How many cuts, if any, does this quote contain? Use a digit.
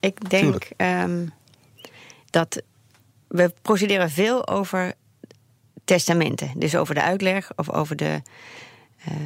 0